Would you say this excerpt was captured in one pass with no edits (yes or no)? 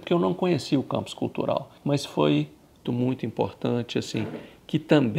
no